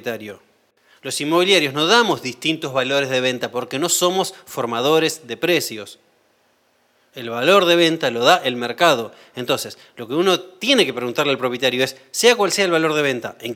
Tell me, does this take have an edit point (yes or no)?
no